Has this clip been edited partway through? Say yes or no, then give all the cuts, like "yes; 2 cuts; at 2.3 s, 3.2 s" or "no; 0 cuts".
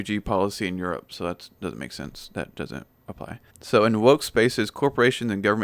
yes; 1 cut; at 3.5 s